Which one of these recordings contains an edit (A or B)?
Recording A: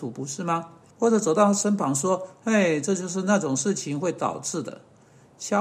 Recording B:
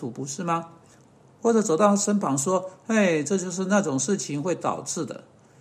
A